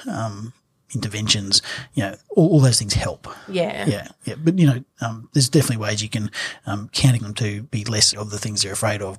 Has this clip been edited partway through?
yes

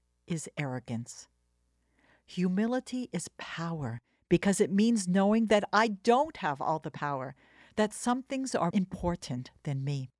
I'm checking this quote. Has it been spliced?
yes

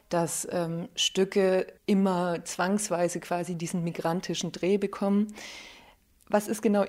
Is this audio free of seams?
no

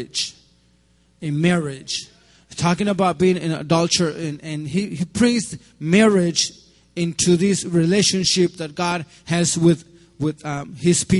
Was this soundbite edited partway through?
no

